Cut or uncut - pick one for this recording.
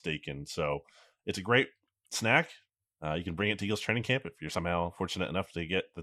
uncut